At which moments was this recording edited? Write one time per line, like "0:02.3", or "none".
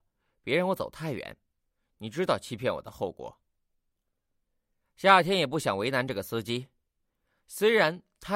none